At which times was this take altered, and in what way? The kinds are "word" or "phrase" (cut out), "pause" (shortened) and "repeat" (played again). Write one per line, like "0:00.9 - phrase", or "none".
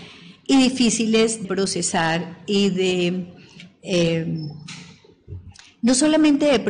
0:01.4 - word